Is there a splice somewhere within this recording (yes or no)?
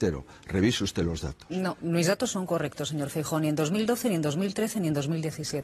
no